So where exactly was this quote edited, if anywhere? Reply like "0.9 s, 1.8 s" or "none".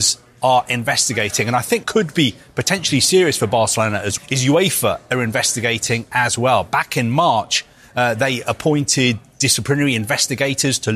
1.8 s, 4.2 s